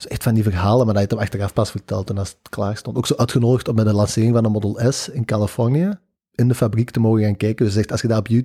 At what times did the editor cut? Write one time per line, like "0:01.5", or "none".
none